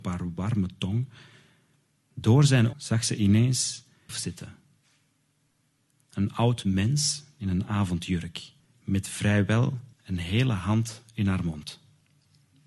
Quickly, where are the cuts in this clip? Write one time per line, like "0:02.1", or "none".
0:02.7
0:04.1
0:08.6
0:09.9